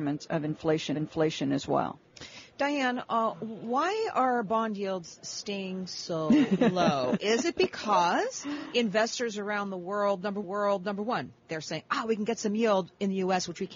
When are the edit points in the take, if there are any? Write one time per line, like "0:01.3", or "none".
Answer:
0:00.9
0:10.4